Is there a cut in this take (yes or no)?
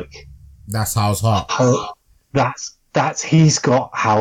no